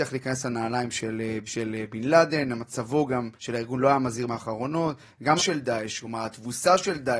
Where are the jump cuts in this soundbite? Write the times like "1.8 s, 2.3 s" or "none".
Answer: 1.5 s, 3.4 s, 4.3 s, 5.4 s

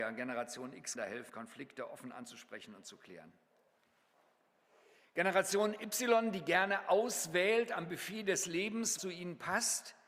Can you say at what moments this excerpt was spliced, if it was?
1.0 s, 1.3 s, 9.0 s

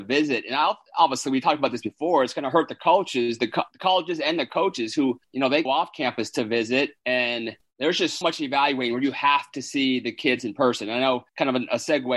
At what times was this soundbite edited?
5.7 s, 7.0 s, 8.2 s

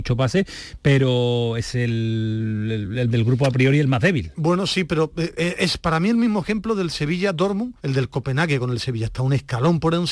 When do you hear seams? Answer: 7.8 s

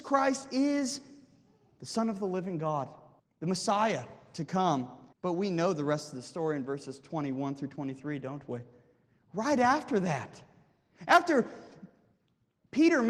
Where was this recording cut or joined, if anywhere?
3.2 s, 5.1 s

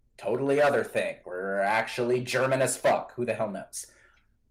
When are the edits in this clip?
1.2 s

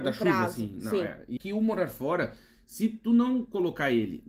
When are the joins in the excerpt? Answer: 1.4 s

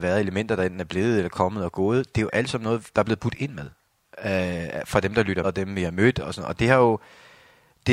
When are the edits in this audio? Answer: 5.4 s

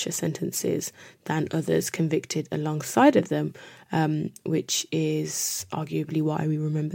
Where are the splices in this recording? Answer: none

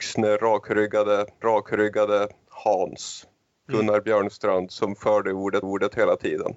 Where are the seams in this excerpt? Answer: 1.4 s, 5.6 s

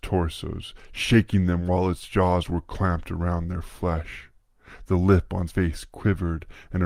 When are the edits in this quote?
5.5 s

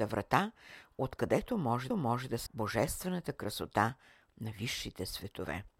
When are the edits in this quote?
1.9 s, 2.5 s

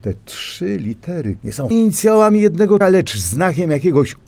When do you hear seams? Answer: 1.4 s, 1.7 s, 2.8 s

